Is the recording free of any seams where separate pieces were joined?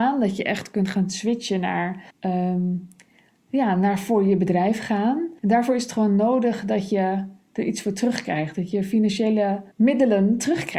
no; 3 cuts; at 2.1 s, 5.4 s, 9.7 s

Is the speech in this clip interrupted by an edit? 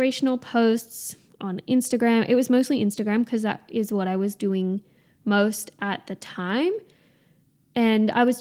no; 0 cuts

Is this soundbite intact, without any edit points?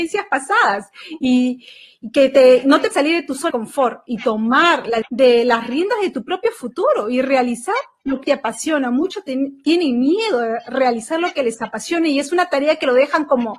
no; 4 cuts; at 2.9 s, 3.5 s, 5.0 s, 8.2 s

